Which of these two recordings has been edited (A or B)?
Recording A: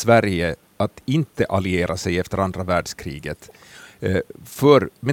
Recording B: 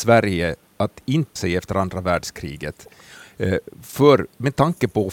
B